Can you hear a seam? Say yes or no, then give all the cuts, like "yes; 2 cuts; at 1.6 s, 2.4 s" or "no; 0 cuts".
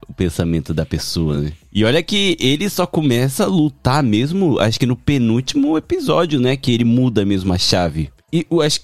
no; 0 cuts